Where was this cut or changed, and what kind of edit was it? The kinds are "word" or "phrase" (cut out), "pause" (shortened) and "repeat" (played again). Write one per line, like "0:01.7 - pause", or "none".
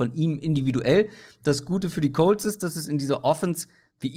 none